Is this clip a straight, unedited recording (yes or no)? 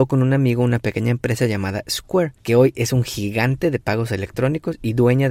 yes